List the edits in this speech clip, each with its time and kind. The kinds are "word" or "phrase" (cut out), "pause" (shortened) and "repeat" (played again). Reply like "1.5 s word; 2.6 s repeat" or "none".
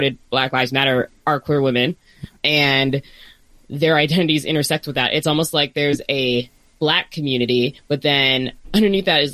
2.4 s pause

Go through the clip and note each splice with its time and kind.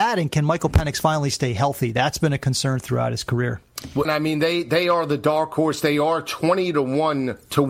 4.0 s phrase

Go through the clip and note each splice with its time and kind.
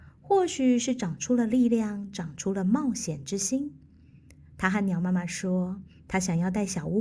none

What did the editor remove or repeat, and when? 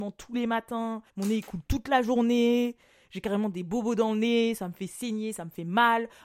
1.1 s pause

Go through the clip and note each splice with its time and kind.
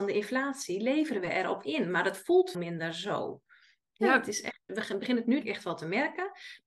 2.5 s word; 4.7 s word; 5.4 s word

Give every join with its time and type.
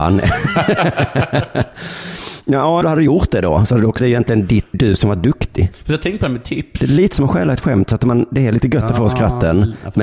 2.8 s phrase; 4.0 s phrase; 4.7 s word

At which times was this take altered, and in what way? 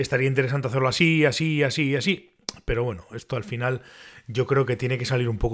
none

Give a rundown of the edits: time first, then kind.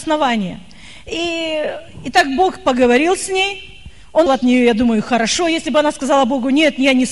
4.3 s word

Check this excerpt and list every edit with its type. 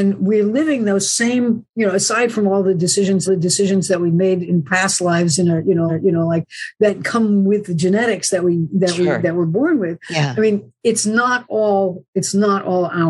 1.7 s pause; 3.3 s repeat; 5.9 s repeat

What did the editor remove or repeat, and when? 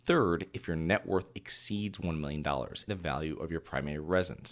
2.9 s word

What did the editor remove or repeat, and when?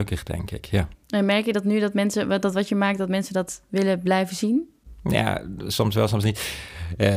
1.0 s pause

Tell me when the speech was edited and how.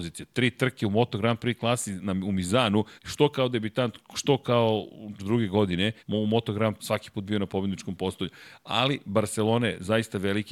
3.0 s pause; 5.2 s word; 6.0 s pause; 6.8 s word

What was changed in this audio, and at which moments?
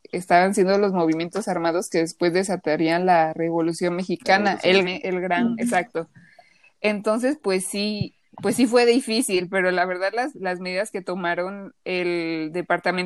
4.8 s word

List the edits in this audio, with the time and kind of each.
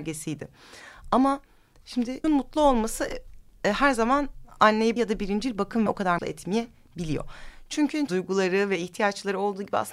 2.2 s word; 5.0 s word; 5.9 s word; 6.2 s word; 8.1 s word

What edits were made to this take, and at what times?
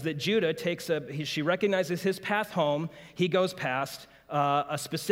none

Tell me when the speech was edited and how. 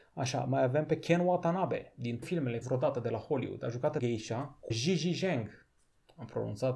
2.2 s word; 2.6 s word; 4.0 s word; 4.7 s word

